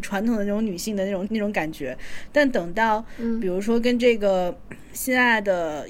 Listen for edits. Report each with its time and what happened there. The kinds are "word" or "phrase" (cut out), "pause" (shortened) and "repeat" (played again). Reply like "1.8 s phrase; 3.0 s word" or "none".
1.3 s word